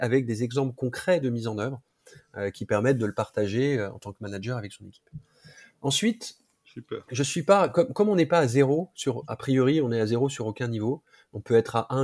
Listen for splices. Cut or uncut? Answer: uncut